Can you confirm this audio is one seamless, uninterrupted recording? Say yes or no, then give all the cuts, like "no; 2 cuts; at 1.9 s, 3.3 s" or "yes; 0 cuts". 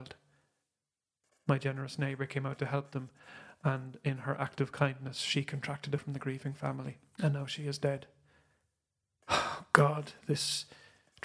no; 1 cut; at 6.0 s